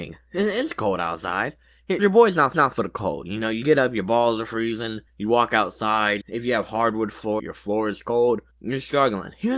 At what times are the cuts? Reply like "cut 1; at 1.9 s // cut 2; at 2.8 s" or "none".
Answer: cut 1; at 2.0 s // cut 2; at 2.5 s // cut 3; at 5.1 s // cut 4; at 6.2 s // cut 5; at 7.4 s // cut 6; at 8.5 s